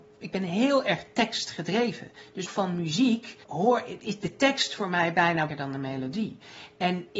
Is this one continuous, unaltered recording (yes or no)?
no